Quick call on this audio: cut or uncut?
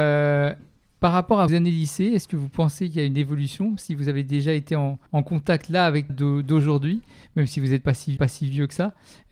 cut